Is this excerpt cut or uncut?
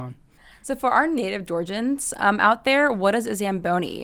uncut